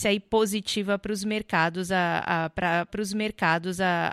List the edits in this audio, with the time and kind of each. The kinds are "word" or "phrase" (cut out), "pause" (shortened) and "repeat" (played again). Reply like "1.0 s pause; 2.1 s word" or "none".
2.9 s repeat